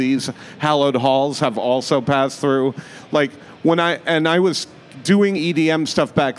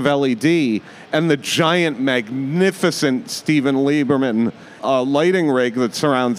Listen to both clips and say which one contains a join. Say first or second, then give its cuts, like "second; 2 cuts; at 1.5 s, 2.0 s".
second; 1 cut; at 4.8 s